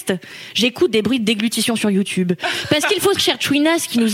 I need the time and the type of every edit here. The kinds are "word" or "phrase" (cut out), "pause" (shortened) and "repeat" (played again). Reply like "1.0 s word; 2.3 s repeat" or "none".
3.2 s word